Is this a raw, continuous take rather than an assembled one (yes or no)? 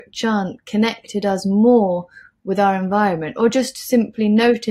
yes